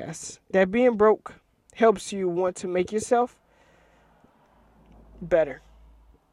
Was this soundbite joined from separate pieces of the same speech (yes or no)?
no